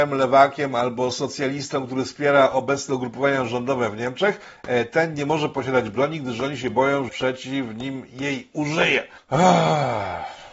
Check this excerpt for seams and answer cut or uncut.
cut